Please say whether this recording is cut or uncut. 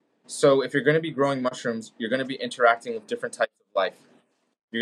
uncut